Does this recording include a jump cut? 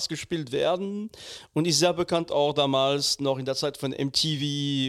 no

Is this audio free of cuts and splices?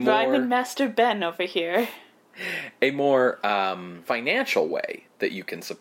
yes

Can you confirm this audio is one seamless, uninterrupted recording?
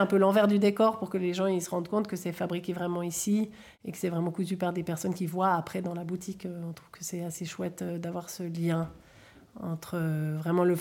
yes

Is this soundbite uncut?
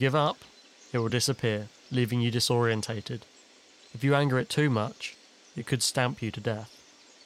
yes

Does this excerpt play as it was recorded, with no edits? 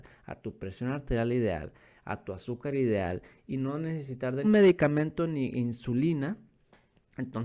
no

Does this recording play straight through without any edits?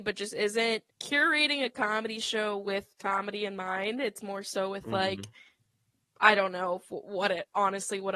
no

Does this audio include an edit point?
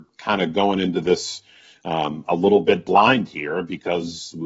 no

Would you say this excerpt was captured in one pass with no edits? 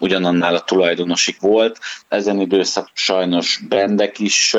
no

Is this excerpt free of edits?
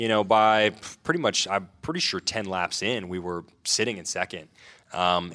yes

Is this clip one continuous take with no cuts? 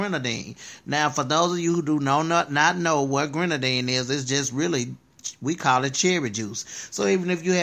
yes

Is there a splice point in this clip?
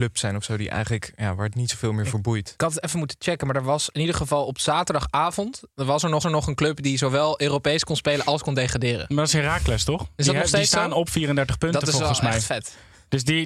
yes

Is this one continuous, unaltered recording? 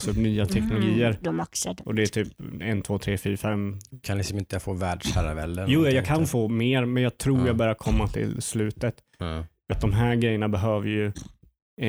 no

